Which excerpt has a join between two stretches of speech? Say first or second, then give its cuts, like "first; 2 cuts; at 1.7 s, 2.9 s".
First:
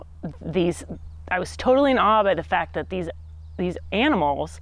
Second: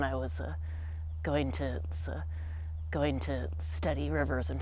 second; 1 cut; at 2.0 s